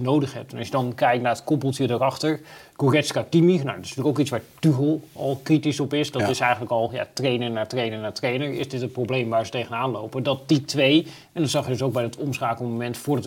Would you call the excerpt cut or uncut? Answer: uncut